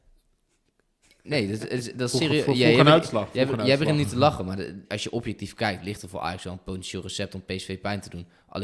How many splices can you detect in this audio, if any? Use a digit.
1